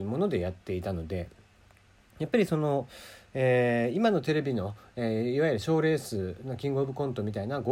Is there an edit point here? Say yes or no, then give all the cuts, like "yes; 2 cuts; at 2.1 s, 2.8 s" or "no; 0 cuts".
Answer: no; 0 cuts